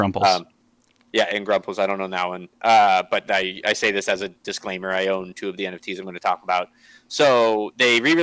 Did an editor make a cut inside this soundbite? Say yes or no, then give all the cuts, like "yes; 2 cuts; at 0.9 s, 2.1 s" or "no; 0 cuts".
no; 0 cuts